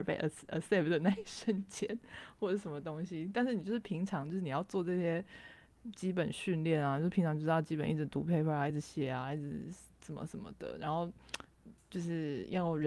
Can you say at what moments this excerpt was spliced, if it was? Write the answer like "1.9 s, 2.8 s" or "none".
none